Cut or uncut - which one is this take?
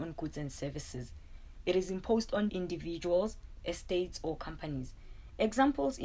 cut